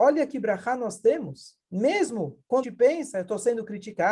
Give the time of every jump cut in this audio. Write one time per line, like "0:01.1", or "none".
0:01.6
0:02.6